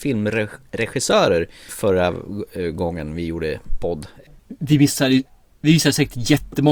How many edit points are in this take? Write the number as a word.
zero